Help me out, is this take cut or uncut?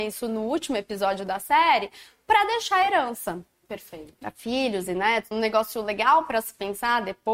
cut